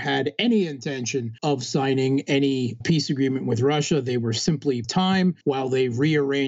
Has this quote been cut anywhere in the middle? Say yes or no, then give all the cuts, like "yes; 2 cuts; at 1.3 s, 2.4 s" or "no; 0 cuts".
yes; 4 cuts; at 1.4 s, 2.8 s, 4.8 s, 5.4 s